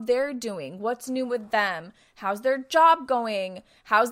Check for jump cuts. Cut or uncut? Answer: uncut